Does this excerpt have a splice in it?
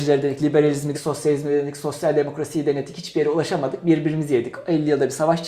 yes; 1 cut; at 0.9 s

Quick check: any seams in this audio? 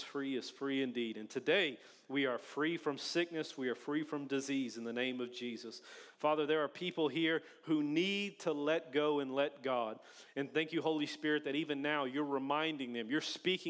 no; 0 cuts

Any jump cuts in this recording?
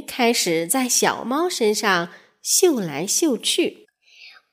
no; 0 cuts

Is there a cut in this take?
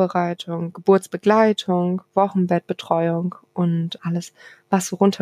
yes; 1 cut; at 4.0 s

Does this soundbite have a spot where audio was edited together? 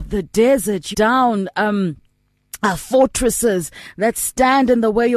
yes; 1 cut; at 0.9 s

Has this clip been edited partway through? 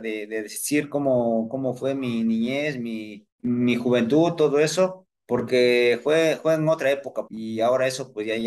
yes; 3 cuts; at 3.3 s, 5.1 s, 7.3 s

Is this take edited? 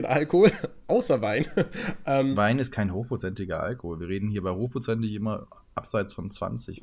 no; 0 cuts

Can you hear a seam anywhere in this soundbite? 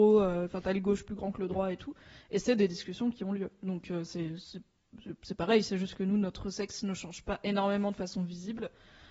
no; 0 cuts

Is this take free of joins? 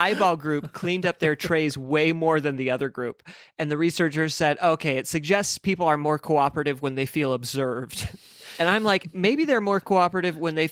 yes; 0 cuts

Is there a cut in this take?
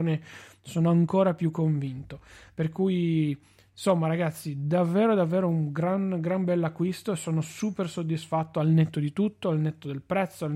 no; 0 cuts

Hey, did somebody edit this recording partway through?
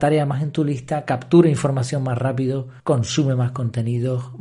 yes; 1 cut; at 2.8 s

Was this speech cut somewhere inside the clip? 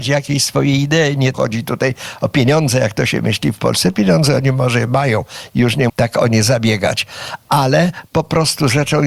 yes; 2 cuts; at 1.3 s, 5.9 s

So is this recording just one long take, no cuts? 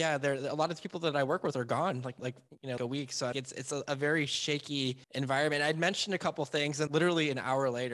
no; 5 cuts; at 2.2 s, 2.8 s, 3.3 s, 5.0 s, 6.9 s

